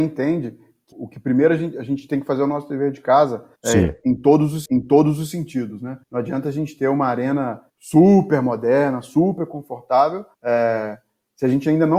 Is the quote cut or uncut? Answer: cut